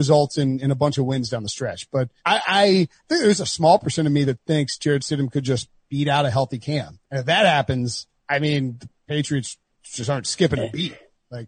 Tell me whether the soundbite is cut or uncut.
cut